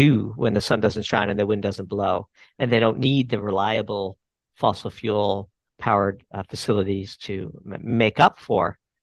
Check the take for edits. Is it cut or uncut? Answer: uncut